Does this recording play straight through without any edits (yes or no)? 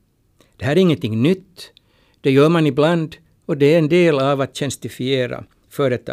yes